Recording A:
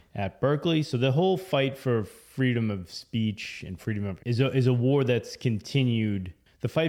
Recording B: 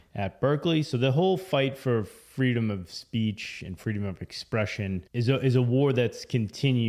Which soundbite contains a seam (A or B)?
A